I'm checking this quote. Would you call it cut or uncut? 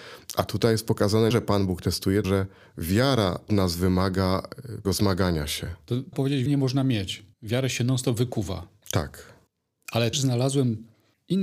cut